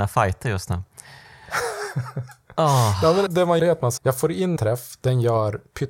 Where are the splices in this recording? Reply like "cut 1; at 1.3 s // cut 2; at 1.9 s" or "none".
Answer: cut 1; at 3.3 s // cut 2; at 3.6 s // cut 3; at 4.0 s // cut 4; at 4.6 s